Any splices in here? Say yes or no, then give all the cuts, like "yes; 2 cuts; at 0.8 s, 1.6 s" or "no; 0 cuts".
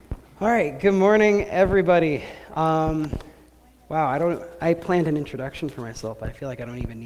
no; 0 cuts